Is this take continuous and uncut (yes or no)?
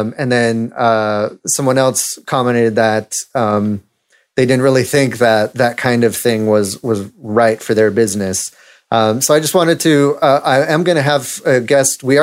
yes